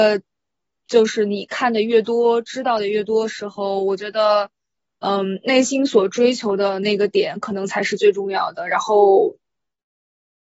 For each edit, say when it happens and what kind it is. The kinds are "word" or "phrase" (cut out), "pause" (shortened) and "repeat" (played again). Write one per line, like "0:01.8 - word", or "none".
none